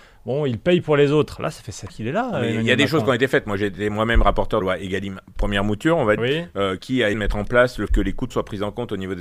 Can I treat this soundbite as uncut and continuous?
no; 7 cuts; at 1.9 s, 4.6 s, 6.2 s, 6.8 s, 7.1 s, 7.9 s, 8.3 s

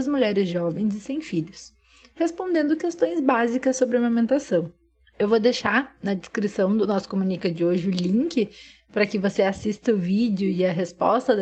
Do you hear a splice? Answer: no; 0 cuts

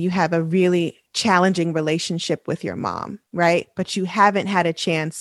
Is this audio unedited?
no; 1 cut; at 1.1 s

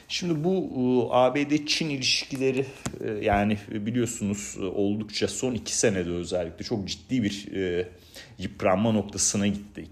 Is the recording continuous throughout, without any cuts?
yes; 0 cuts

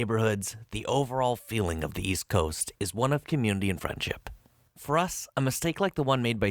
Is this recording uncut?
yes; 0 cuts

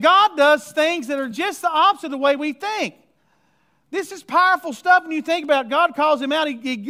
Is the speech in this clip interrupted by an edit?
no; 0 cuts

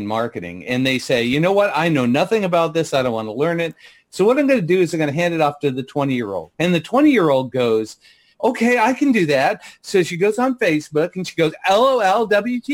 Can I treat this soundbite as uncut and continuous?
no; 1 cut; at 6.5 s

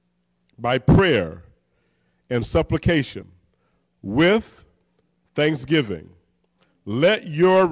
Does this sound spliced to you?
no; 0 cuts

